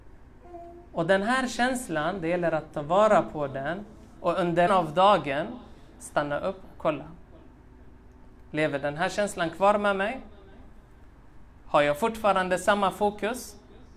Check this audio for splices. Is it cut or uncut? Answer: cut